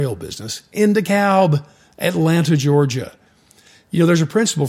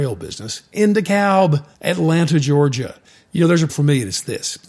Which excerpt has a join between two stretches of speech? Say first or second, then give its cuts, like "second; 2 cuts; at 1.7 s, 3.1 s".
second; 3 cuts; at 1.7 s, 3.0 s, 3.7 s